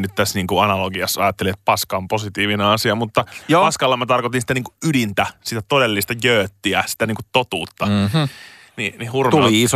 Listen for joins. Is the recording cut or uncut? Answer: uncut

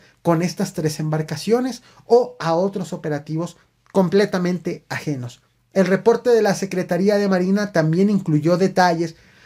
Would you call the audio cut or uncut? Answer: uncut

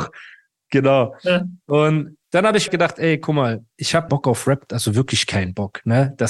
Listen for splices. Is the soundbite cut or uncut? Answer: cut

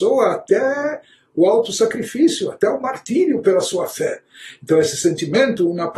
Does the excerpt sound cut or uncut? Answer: uncut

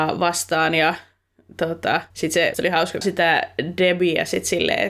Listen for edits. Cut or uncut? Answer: cut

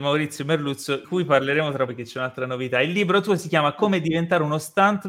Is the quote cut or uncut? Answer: cut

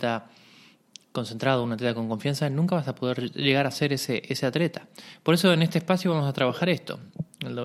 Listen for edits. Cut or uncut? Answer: uncut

